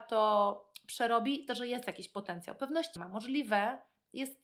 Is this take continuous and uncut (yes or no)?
no